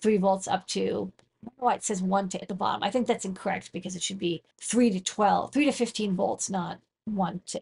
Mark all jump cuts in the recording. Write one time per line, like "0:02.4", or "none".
0:02.4
0:04.5